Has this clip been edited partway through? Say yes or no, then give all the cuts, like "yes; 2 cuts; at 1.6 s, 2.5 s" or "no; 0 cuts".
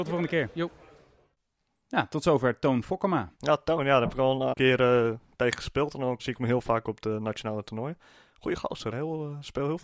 yes; 4 cuts; at 3.4 s, 4.5 s, 6.2 s, 8.9 s